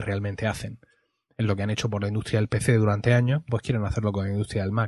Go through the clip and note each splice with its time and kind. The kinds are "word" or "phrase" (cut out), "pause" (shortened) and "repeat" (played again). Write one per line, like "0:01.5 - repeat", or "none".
0:03.5 - word